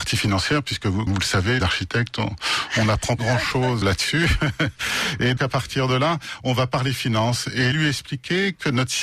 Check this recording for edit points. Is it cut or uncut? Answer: cut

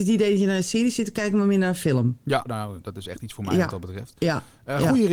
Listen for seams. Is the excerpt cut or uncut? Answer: cut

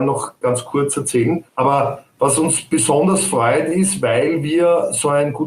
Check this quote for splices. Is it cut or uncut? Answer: cut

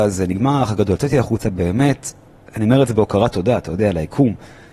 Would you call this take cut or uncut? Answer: uncut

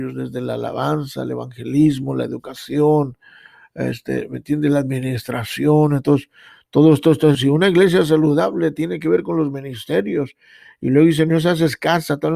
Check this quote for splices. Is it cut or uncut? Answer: cut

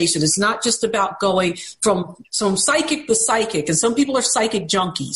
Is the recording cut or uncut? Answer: uncut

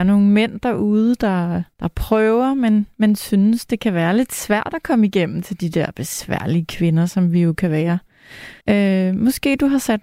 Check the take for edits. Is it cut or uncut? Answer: cut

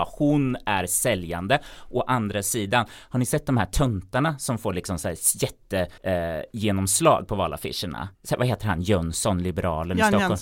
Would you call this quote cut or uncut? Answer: cut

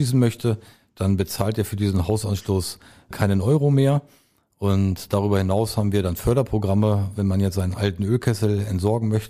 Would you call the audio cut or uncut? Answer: uncut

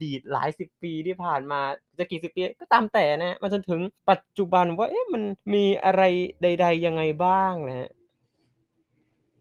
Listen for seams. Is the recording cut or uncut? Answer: cut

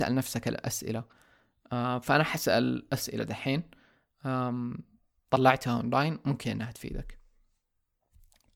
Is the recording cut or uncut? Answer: uncut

